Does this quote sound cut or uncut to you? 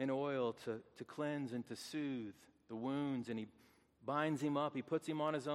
uncut